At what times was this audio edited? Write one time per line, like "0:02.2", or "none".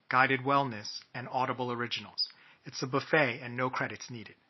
none